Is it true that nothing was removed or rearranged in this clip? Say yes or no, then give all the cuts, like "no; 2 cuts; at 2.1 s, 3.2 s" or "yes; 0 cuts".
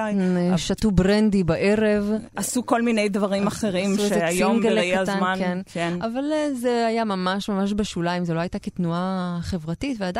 yes; 0 cuts